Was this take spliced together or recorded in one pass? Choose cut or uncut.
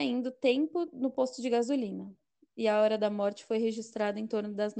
uncut